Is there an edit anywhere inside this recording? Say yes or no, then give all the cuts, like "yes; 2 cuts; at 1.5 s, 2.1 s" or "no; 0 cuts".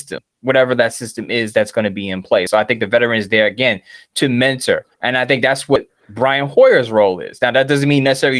yes; 1 cut; at 4.9 s